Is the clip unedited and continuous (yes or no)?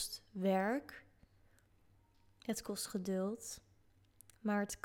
yes